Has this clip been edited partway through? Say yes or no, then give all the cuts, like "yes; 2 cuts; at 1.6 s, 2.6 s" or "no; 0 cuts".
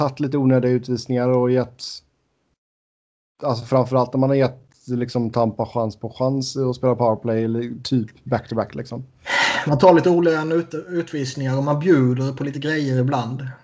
no; 0 cuts